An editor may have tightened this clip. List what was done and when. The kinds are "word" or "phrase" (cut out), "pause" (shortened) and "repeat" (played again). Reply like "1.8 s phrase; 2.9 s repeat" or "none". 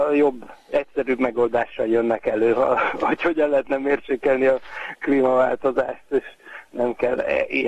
none